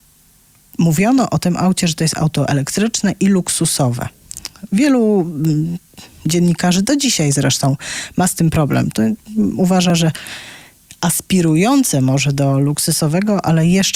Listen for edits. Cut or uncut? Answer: uncut